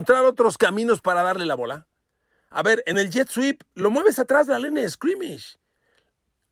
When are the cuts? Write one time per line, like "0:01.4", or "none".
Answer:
none